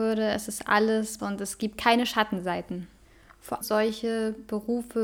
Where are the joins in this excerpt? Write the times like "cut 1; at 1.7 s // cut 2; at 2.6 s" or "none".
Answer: cut 1; at 1.2 s // cut 2; at 3.6 s